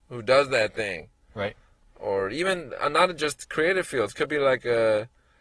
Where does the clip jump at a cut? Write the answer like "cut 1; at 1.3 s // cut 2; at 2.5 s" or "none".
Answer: none